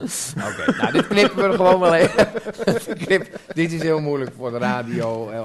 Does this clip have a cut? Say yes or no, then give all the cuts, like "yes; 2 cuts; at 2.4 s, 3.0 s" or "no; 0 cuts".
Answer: no; 0 cuts